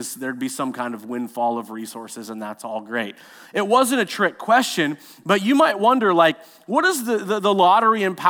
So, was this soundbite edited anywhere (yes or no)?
no